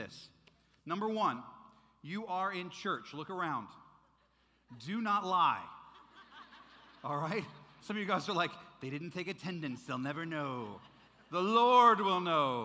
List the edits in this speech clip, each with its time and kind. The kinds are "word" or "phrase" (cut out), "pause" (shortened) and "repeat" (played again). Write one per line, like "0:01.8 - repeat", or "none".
none